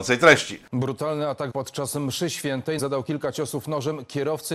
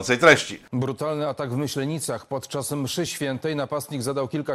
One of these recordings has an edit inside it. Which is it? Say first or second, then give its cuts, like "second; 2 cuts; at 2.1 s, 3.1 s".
first; 2 cuts; at 1.5 s, 2.8 s